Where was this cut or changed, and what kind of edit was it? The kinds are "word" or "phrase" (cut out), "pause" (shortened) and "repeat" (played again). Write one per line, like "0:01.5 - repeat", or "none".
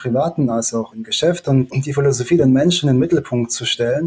0:00.9 - word
0:01.7 - word